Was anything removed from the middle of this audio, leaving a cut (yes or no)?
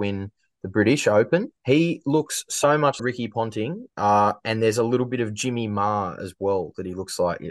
yes